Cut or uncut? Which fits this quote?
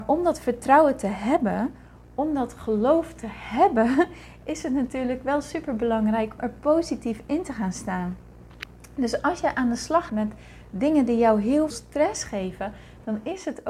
cut